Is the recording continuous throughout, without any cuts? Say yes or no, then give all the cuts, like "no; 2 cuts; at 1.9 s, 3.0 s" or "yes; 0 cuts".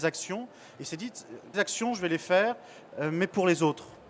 no; 1 cut; at 1.5 s